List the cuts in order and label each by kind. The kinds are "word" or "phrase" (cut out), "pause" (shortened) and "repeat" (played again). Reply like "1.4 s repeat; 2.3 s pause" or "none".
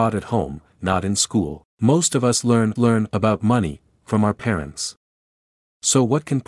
1.7 s pause; 2.8 s repeat